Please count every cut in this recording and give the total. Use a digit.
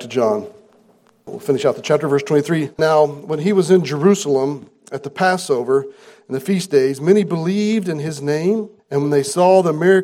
2